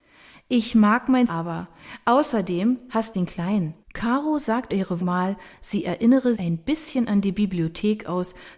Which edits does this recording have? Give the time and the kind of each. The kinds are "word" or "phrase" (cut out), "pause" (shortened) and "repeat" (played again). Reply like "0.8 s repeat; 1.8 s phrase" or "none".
1.3 s word; 3.1 s phrase; 3.8 s pause; 4.7 s word; 5.0 s word; 6.4 s word

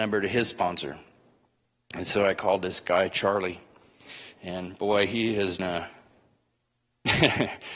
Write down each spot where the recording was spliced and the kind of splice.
5.6 s word

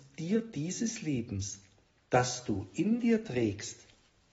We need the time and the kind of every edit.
none

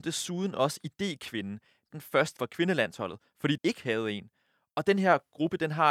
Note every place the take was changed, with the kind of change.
1.9 s word; 2.4 s word; 3.6 s word

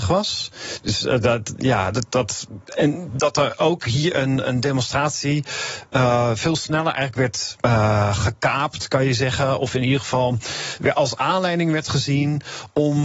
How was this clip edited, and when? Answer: 2.7 s pause; 7.6 s pause

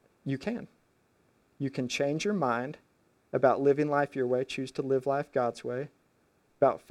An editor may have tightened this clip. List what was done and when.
none

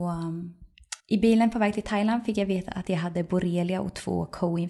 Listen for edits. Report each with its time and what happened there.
1.0 s pause

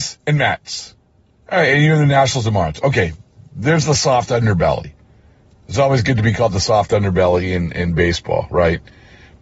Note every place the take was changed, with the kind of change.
none

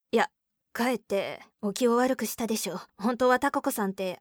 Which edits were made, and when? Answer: 1.5 s pause; 2.9 s pause

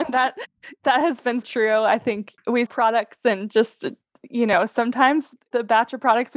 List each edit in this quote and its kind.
1.4 s word; 2.7 s word

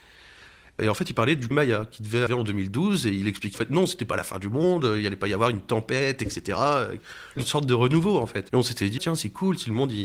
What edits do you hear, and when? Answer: 1.5 s word; 2.3 s word; 3.5 s word; 9.0 s word

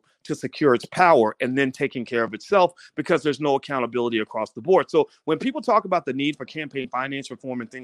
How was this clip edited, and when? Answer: none

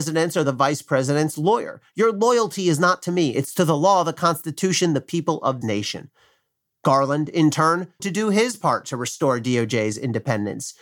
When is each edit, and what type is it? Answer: 5.6 s word; 8.0 s word

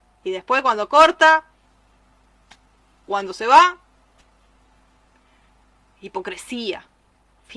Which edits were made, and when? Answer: 3.1 s word

